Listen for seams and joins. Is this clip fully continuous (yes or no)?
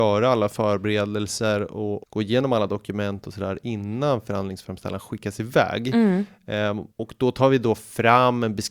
no